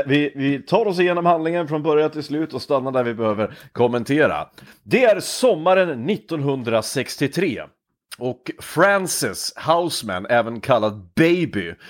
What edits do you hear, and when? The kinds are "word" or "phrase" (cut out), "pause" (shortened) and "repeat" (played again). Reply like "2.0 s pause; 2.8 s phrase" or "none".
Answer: none